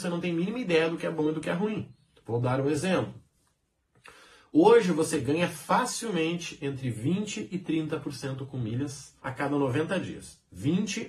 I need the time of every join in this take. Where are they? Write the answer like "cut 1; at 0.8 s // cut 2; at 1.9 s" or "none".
cut 1; at 9.2 s

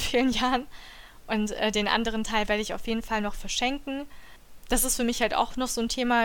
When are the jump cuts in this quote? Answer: none

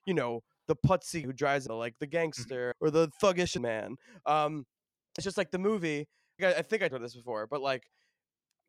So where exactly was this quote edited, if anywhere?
cut 1; at 1.2 s // cut 2; at 1.7 s // cut 3; at 2.7 s // cut 4; at 3.6 s // cut 5; at 5.2 s // cut 6; at 6.4 s // cut 7; at 6.9 s

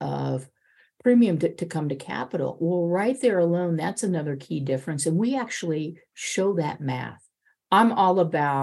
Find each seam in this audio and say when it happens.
none

